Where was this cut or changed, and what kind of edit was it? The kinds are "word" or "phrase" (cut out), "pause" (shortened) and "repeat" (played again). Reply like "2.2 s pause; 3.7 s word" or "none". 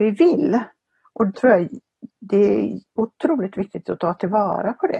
1.3 s word